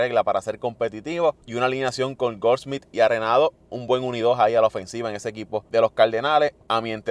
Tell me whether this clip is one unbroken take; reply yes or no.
yes